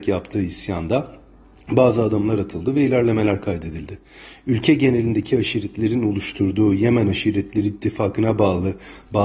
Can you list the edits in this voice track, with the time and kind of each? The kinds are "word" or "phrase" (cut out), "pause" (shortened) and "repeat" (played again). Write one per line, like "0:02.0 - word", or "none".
none